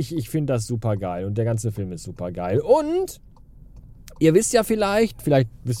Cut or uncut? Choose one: uncut